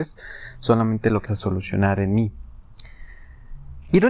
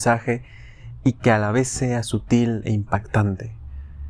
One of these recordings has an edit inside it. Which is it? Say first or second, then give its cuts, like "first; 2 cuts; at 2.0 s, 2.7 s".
first; 1 cut; at 1.3 s